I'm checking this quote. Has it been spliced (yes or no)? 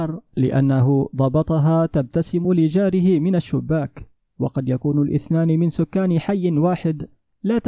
no